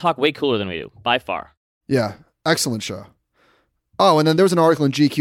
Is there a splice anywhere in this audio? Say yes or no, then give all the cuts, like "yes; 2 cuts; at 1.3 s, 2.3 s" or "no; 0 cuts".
no; 0 cuts